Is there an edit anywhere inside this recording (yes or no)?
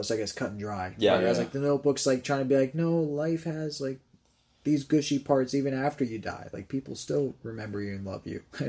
no